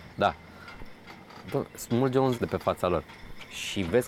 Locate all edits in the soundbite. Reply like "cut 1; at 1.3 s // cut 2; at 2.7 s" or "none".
cut 1; at 2.3 s